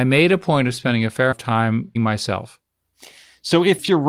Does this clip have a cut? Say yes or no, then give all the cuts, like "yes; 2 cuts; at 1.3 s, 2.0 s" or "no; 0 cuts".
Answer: yes; 2 cuts; at 1.3 s, 2.0 s